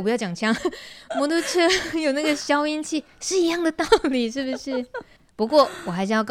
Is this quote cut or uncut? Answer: uncut